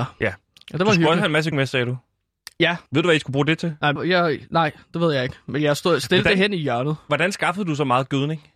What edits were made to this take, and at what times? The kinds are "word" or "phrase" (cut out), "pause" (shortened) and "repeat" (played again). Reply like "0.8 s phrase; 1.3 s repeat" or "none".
1.5 s word; 2.9 s pause; 4.0 s word